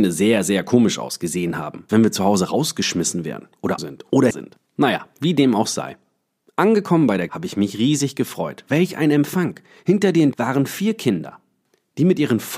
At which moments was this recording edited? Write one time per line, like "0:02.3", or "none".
0:01.9
0:03.8
0:04.3
0:07.3
0:10.3